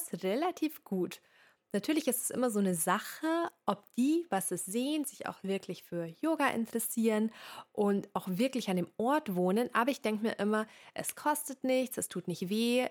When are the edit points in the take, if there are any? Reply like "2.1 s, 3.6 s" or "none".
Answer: none